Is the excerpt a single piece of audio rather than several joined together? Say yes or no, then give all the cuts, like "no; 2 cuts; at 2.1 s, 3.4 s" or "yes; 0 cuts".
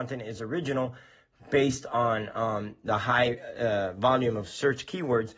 yes; 0 cuts